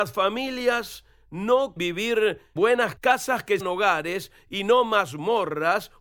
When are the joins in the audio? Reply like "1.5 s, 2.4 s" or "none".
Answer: 1.8 s, 2.6 s, 3.0 s, 3.6 s